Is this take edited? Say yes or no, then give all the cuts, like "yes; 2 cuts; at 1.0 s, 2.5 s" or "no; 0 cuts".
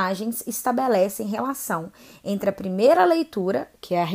no; 0 cuts